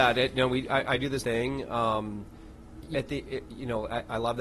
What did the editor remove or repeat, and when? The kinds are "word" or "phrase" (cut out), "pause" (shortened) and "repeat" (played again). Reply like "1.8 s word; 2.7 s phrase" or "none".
1.2 s word; 2.9 s word